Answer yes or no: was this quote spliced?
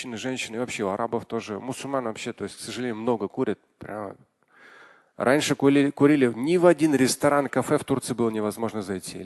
no